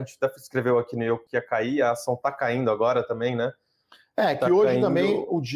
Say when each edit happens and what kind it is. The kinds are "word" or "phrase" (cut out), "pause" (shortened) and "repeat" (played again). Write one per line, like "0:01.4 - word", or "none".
0:01.3 - word